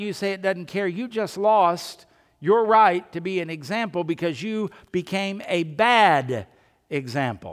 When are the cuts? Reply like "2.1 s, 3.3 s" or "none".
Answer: none